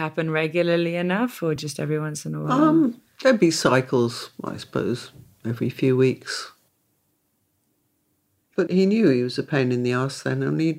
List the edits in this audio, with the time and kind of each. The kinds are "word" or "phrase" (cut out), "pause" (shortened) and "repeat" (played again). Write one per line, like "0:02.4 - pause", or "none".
none